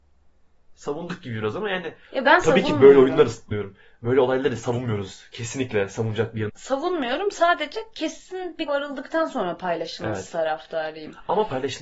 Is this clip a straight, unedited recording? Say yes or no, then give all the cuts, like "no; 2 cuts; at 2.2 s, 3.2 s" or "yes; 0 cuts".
no; 3 cuts; at 3.5 s, 6.5 s, 8.7 s